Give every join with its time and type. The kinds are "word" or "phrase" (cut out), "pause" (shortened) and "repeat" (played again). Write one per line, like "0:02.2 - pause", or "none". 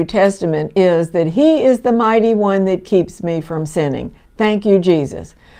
none